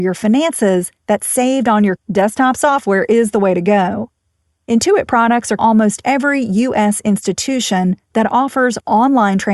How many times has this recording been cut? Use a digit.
2